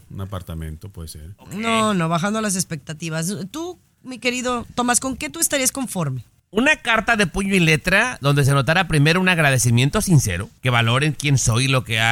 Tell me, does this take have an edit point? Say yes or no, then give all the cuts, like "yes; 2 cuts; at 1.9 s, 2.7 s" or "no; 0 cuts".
no; 0 cuts